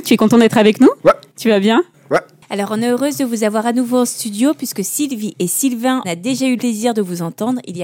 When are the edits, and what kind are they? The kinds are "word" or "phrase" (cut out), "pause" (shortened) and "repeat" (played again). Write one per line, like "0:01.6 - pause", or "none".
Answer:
0:06.0 - word
0:06.6 - word